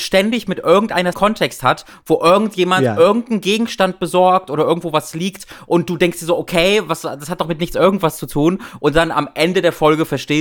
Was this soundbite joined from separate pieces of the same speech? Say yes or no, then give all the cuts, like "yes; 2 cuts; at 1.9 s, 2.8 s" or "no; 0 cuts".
yes; 1 cut; at 1.1 s